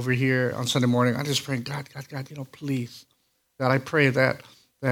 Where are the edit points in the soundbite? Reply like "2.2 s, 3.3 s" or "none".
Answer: none

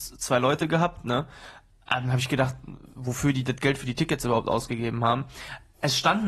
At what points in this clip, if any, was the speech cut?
none

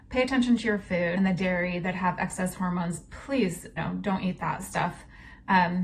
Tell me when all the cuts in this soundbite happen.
1.2 s, 3.8 s

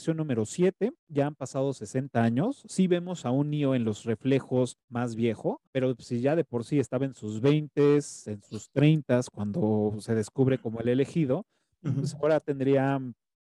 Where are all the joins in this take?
1.0 s, 4.8 s, 5.7 s

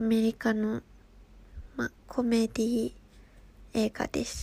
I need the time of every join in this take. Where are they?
2.0 s

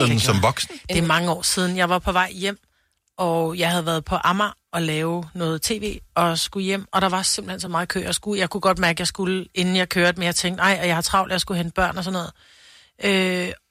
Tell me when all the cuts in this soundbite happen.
none

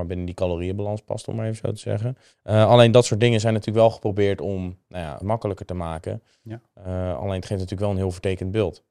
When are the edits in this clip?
2.3 s, 5.2 s

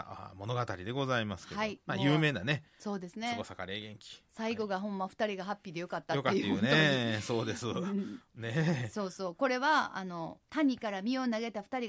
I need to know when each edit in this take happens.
6.4 s, 10.4 s

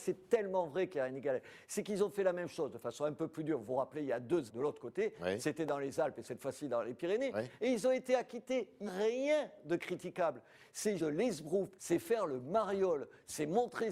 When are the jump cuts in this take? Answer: 4.5 s, 8.9 s, 11.0 s, 11.7 s

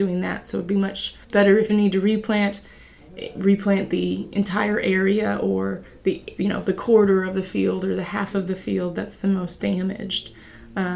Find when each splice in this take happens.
1.2 s, 1.7 s, 6.4 s

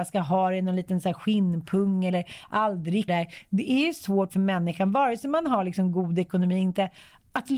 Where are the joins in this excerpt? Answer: 3.1 s

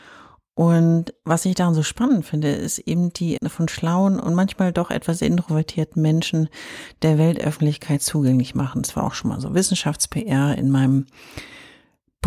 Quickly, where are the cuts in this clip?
3.4 s

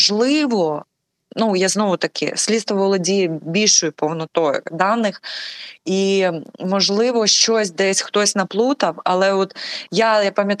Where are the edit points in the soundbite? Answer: none

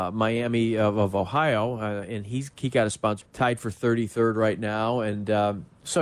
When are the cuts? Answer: 3.2 s

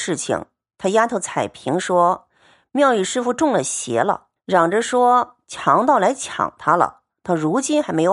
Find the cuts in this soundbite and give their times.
4.4 s

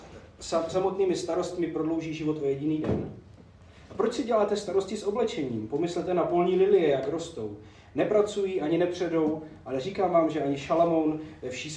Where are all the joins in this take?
none

